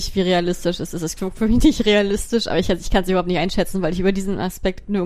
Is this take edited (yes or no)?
no